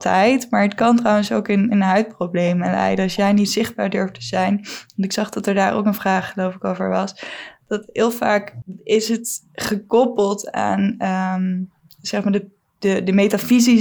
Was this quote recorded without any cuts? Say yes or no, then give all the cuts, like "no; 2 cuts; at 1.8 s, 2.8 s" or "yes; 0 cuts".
yes; 0 cuts